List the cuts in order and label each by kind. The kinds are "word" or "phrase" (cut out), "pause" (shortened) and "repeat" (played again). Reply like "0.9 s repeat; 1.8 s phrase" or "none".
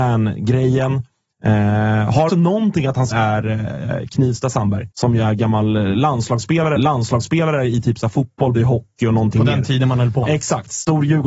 2.3 s word; 3.1 s word; 4.9 s pause; 6.8 s repeat; 8.5 s word; 10.2 s word